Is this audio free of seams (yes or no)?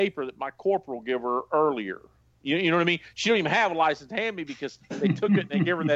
yes